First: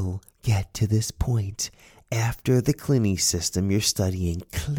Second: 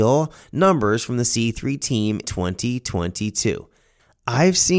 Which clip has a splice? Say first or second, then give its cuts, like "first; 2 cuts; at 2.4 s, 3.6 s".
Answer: second; 1 cut; at 2.2 s